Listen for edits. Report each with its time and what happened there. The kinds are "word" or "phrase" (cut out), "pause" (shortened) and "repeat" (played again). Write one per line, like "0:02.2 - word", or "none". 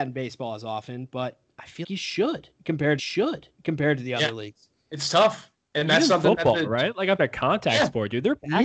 0:01.8 - word
0:03.0 - repeat
0:05.6 - pause
0:07.2 - word